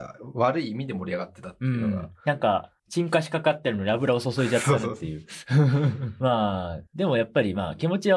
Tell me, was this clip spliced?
yes; 2 cuts; at 2.8 s, 6.9 s

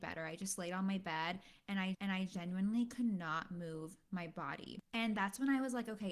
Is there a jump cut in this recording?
yes; 1 cut; at 1.9 s

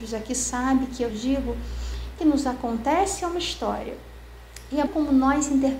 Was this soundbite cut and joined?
yes; 3 cuts; at 1.1 s, 2.2 s, 4.9 s

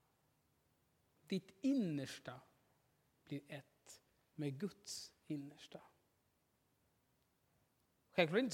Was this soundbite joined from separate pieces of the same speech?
no; 0 cuts

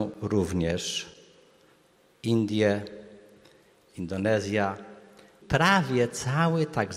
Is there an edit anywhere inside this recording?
yes; 1 cut; at 5.4 s

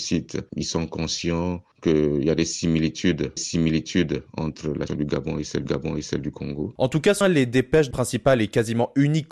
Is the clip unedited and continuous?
no; 6 cuts; at 1.7 s, 3.4 s, 4.9 s, 5.6 s, 7.2 s, 7.9 s

